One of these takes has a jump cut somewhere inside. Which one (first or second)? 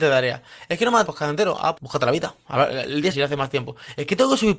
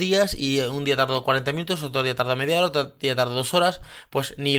first